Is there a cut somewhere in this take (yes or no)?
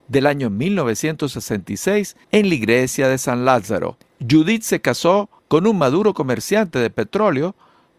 yes